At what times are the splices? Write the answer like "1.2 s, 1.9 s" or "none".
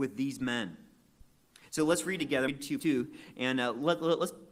2.5 s, 2.8 s